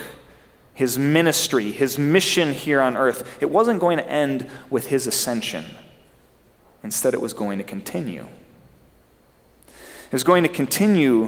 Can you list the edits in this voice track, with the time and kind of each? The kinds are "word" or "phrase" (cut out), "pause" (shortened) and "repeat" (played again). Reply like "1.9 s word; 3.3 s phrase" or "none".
none